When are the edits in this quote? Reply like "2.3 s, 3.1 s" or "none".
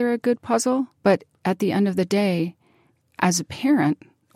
1.0 s